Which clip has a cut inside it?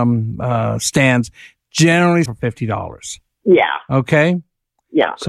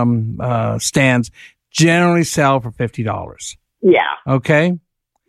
first; 1 cut; at 2.3 s

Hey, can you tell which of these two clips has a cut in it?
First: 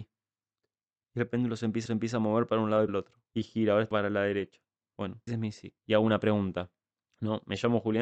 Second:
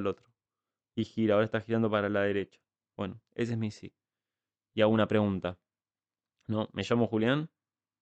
first; 7 cuts; at 1.9 s, 2.9 s, 3.3 s, 3.9 s, 5.3 s, 5.8 s, 6.9 s

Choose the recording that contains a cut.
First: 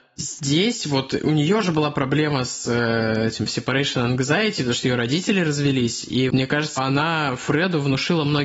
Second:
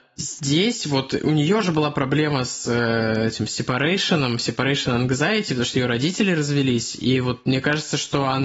first; 3 cuts; at 3.5 s, 6.3 s, 6.8 s

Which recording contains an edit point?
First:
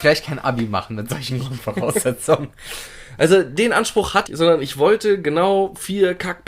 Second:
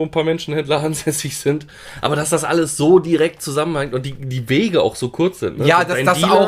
first; 1 cut; at 4.3 s

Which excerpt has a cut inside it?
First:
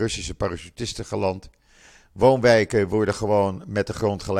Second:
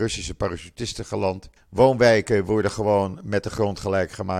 second; 1 cut; at 1.6 s

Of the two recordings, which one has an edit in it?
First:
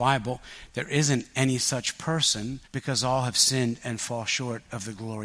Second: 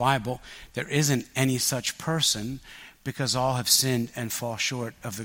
first; 1 cut; at 2.6 s

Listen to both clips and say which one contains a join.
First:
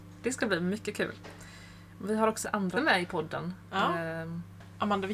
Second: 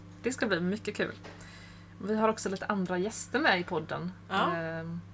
first; 2 cuts; at 2.4 s, 2.7 s

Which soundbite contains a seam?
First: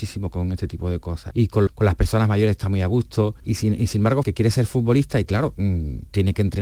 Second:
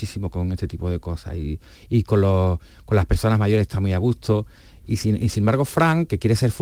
first; 4 cuts; at 1.3 s, 1.7 s, 3.4 s, 4.2 s

